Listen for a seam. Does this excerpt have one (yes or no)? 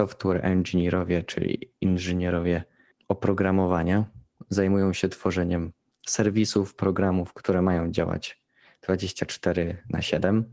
no